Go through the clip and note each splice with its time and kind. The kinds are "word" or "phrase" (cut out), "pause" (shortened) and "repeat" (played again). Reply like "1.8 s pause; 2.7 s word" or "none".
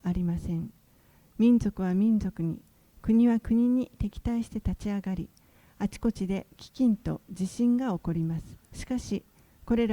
8.6 s pause